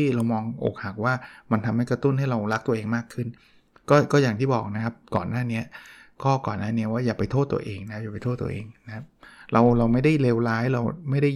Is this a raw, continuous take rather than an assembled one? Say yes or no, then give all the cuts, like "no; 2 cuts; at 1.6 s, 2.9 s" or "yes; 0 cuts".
yes; 0 cuts